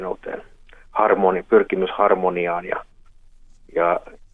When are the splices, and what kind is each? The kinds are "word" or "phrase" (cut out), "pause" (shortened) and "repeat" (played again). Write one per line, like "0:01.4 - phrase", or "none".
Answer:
none